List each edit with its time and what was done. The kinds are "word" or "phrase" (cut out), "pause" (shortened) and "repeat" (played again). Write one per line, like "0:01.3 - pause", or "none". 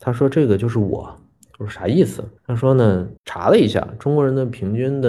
0:02.4 - pause
0:03.2 - pause